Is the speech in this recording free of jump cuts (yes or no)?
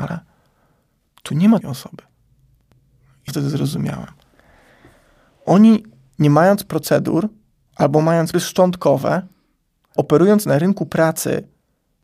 no